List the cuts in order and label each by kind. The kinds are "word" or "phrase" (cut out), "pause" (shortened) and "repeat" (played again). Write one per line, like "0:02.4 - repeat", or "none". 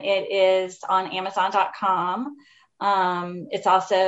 none